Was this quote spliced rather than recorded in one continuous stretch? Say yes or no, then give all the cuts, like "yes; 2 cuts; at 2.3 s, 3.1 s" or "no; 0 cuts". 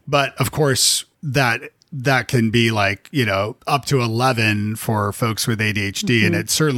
yes; 2 cuts; at 1.1 s, 3.6 s